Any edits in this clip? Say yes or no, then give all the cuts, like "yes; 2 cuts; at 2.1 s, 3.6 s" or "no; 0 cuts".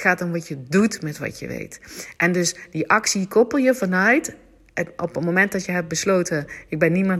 no; 0 cuts